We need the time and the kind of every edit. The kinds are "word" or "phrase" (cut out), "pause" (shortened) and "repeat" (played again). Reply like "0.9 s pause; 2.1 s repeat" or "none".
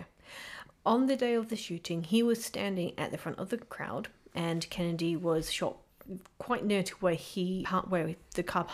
7.6 s word

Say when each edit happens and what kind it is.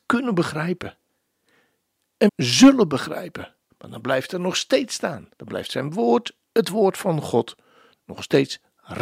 2.3 s phrase; 3.7 s pause; 5.3 s pause

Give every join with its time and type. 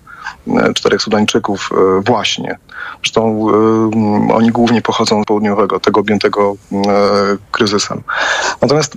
5.2 s phrase; 5.8 s word

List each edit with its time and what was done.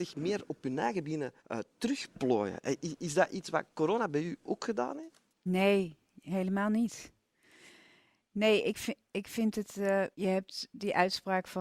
1.4 s pause; 5.3 s pause; 10.1 s pause

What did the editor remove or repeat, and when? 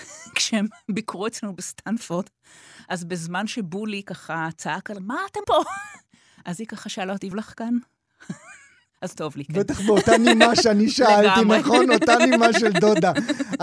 5.0 s word; 5.4 s word; 7.3 s word

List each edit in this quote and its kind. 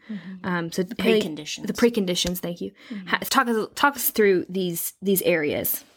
3.3 s phrase

